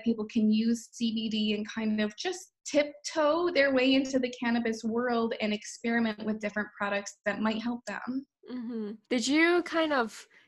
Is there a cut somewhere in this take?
yes; 1 cut; at 9.0 s

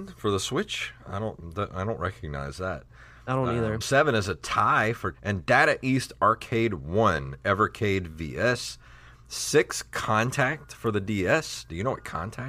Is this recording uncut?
no; 2 cuts; at 3.8 s, 5.1 s

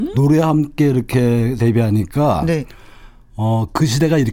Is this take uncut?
no; 1 cut; at 1.6 s

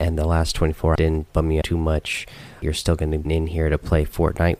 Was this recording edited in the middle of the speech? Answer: yes; 5 cuts; at 0.9 s, 1.3 s, 1.6 s, 2.6 s, 3.3 s

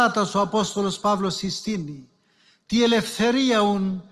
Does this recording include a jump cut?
no; 0 cuts

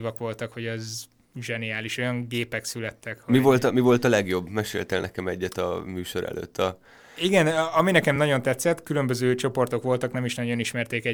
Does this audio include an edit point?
no; 0 cuts

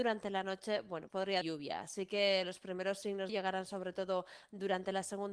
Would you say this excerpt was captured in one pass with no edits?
no; 3 cuts; at 1.1 s, 1.4 s, 3.3 s

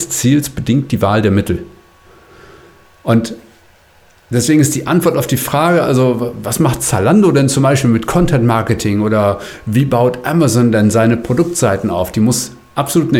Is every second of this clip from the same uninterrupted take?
yes; 0 cuts

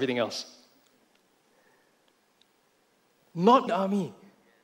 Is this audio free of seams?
no; 1 cut; at 3.7 s

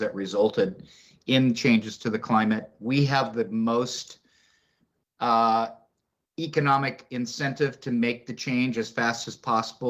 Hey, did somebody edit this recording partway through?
no; 0 cuts

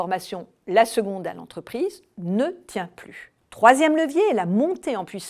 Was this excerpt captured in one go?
yes; 0 cuts

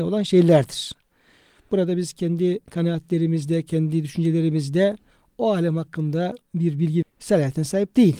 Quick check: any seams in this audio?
yes; 1 cut; at 7.0 s

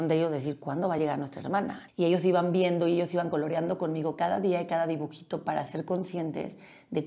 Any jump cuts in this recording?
no; 0 cuts

